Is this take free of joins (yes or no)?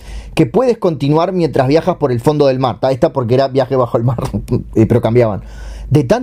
yes